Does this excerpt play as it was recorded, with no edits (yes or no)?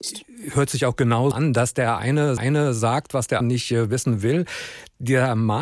no